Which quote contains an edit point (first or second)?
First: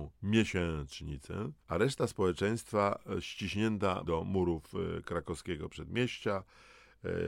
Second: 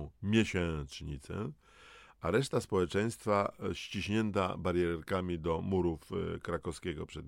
first